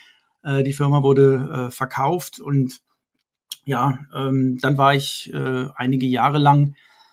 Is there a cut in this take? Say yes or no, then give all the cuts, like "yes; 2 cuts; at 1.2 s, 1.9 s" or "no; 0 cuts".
no; 0 cuts